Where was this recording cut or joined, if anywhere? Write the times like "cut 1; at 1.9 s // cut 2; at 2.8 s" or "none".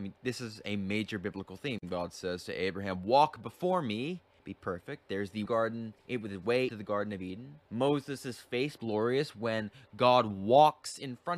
cut 1; at 4.4 s // cut 2; at 5.5 s // cut 3; at 6.0 s // cut 4; at 6.7 s // cut 5; at 7.7 s // cut 6; at 8.8 s